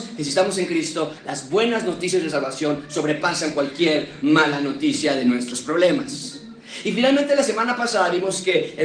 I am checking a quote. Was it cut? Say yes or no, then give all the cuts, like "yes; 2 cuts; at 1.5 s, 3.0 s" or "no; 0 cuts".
no; 0 cuts